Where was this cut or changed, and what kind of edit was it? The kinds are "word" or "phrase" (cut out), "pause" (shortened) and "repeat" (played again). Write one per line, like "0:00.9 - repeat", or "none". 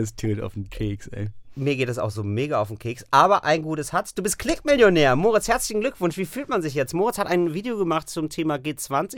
none